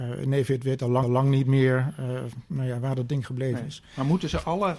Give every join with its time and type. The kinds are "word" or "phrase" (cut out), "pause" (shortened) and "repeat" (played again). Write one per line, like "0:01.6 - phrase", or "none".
0:01.0 - repeat